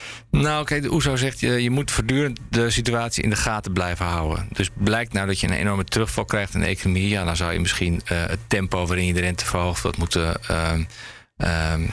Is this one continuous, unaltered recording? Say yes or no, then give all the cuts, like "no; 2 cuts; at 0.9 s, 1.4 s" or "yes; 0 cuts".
yes; 0 cuts